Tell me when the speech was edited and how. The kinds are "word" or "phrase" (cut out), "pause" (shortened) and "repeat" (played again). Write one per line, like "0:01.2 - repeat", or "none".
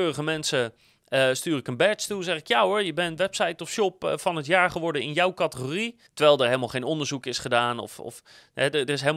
0:06.1 - pause